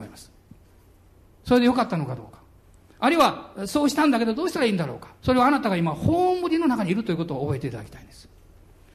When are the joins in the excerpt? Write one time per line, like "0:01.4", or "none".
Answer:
0:05.1